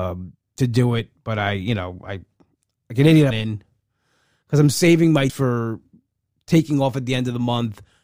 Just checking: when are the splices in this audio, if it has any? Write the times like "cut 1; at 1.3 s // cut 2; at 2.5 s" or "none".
cut 1; at 3.3 s // cut 2; at 5.3 s